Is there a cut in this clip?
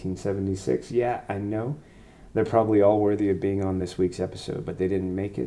no; 0 cuts

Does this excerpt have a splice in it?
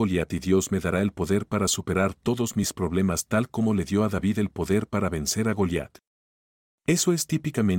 no; 0 cuts

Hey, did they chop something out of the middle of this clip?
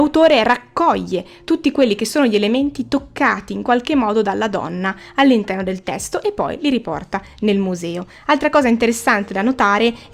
no; 0 cuts

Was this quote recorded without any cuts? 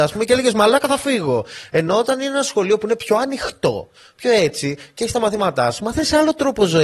yes; 0 cuts

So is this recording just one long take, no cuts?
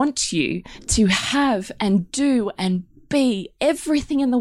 yes; 0 cuts

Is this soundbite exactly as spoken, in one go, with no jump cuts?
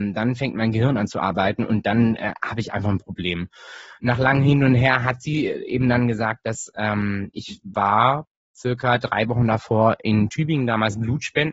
yes; 0 cuts

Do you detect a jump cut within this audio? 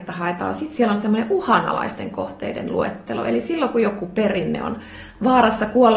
no; 0 cuts

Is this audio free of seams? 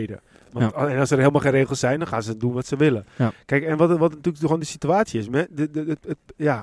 yes; 0 cuts

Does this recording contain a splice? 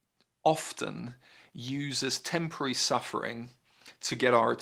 no; 0 cuts

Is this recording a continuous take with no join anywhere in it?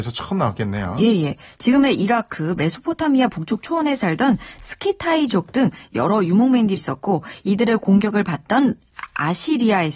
no; 1 cut; at 6.8 s

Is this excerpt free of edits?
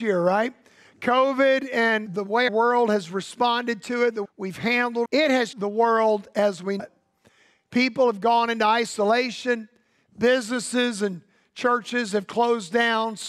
no; 6 cuts; at 2.1 s, 2.5 s, 4.2 s, 5.1 s, 5.5 s, 6.8 s

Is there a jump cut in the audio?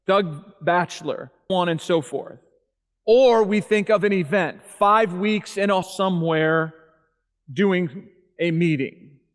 yes; 3 cuts; at 1.5 s, 2.7 s, 5.8 s

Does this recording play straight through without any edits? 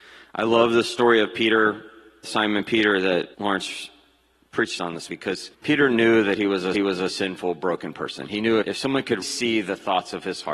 no; 7 cuts; at 2.2 s, 3.3 s, 5.1 s, 5.5 s, 6.7 s, 8.6 s, 9.2 s

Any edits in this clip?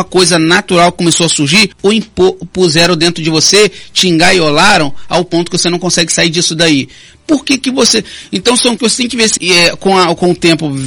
yes; 3 cuts; at 1.7 s, 8.8 s, 9.4 s

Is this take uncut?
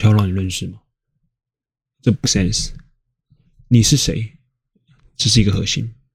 no; 1 cut; at 2.2 s

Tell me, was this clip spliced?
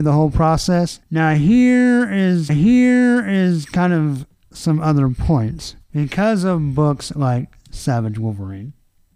yes; 1 cut; at 2.5 s

